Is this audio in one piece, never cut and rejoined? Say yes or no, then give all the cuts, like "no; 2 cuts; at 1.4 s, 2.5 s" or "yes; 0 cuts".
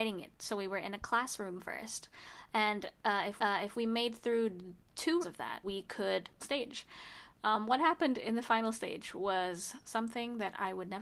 no; 4 cuts; at 3.4 s, 5.2 s, 5.6 s, 6.4 s